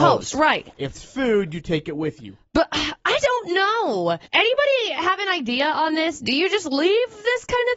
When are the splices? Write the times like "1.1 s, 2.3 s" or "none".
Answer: 0.9 s, 3.2 s, 4.3 s